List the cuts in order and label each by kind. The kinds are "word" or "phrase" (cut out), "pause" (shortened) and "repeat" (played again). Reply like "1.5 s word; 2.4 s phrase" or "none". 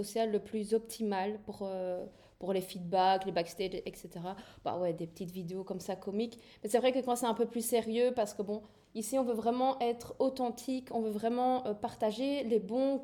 none